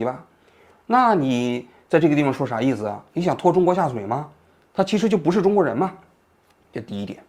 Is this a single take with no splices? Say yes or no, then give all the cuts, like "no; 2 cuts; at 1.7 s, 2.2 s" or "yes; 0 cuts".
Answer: yes; 0 cuts